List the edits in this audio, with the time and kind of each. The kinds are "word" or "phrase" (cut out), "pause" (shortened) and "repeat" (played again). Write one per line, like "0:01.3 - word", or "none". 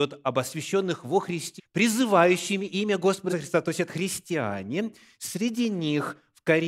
0:01.6 - word
0:03.3 - word
0:03.9 - word